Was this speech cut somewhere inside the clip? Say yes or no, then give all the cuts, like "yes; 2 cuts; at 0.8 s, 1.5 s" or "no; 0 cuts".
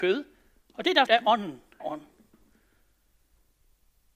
yes; 2 cuts; at 1.1 s, 1.8 s